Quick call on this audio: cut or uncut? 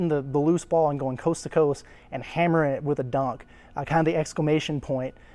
uncut